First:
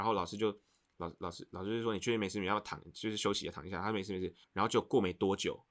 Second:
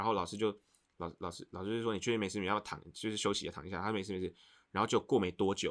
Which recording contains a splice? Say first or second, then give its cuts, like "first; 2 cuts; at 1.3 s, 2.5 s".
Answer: first; 1 cut; at 4.4 s